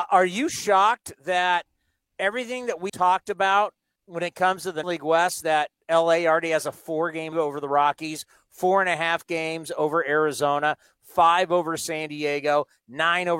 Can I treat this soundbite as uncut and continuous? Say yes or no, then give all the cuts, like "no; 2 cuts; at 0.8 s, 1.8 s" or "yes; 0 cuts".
no; 4 cuts; at 2.9 s, 4.0 s, 4.8 s, 7.3 s